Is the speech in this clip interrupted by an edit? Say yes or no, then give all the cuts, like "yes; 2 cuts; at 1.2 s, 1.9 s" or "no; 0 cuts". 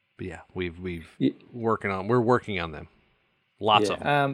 yes; 1 cut; at 1.1 s